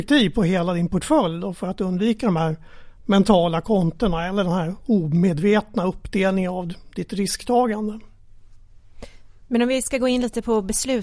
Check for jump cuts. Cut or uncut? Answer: uncut